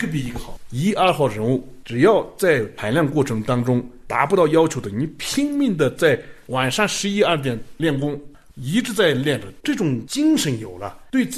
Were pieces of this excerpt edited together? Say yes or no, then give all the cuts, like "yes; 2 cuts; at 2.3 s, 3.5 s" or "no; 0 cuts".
no; 0 cuts